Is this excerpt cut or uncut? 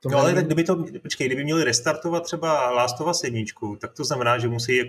uncut